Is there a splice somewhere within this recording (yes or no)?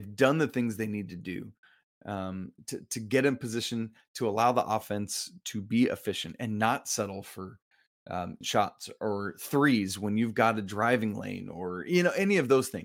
yes